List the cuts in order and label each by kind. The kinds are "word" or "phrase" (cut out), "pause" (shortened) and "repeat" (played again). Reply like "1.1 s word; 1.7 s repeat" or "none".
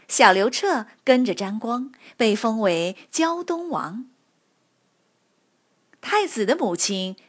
none

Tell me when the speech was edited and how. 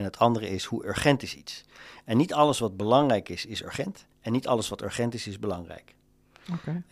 4.1 s pause

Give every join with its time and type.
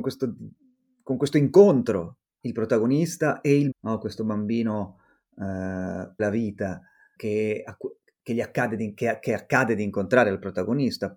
2.4 s word; 3.7 s word; 6.2 s word; 7.2 s word

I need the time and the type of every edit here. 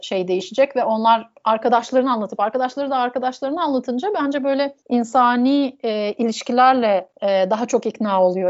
4.8 s pause; 7.1 s pause

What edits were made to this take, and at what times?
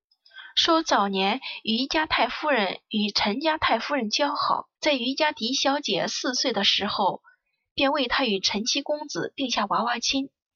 4.8 s pause

